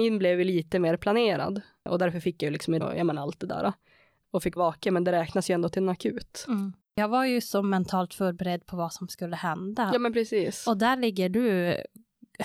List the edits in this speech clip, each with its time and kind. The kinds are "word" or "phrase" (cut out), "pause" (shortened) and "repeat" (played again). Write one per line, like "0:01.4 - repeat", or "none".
0:02.8 - word
0:04.6 - word